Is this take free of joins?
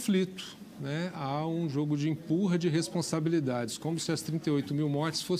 yes; 0 cuts

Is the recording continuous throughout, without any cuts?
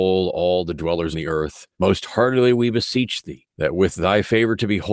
no; 3 cuts; at 1.1 s, 1.7 s, 3.5 s

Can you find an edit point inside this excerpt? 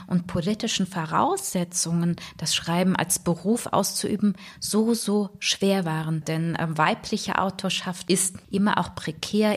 no; 0 cuts

